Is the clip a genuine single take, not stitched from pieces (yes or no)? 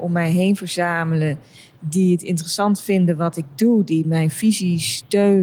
yes